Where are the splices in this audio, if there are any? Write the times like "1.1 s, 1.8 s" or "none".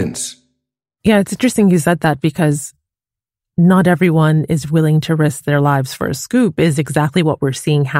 none